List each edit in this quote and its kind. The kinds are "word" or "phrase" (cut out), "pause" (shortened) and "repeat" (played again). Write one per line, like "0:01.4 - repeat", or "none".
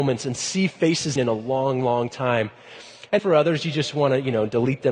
0:01.2 - phrase
0:03.2 - word